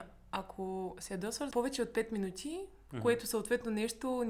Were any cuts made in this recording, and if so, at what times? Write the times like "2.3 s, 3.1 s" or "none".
1.5 s